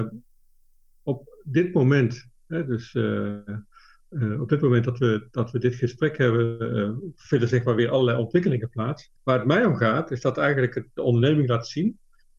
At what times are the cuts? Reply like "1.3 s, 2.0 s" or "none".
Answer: 9.2 s

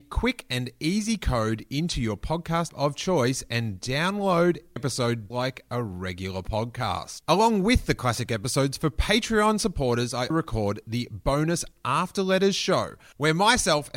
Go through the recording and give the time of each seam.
2.7 s, 4.8 s, 5.3 s, 10.3 s

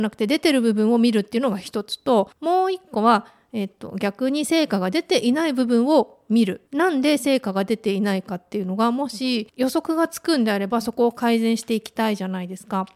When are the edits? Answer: 2.3 s, 6.7 s

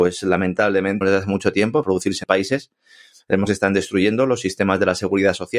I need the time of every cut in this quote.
1.0 s, 1.8 s, 2.2 s, 3.5 s

